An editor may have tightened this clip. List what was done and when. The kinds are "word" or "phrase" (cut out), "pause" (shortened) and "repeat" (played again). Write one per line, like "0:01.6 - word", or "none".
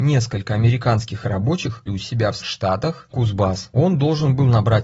0:01.9 - word
0:02.4 - word
0:03.1 - word